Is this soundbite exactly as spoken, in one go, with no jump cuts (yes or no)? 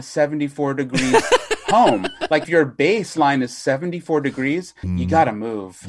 no